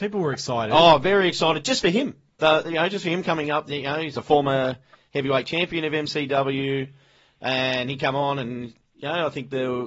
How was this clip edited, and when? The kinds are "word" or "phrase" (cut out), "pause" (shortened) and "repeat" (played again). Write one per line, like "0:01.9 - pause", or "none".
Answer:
none